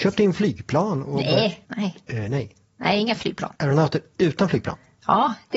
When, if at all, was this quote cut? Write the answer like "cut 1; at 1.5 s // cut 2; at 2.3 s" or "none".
cut 1; at 1.6 s // cut 2; at 2.6 s // cut 3; at 3.6 s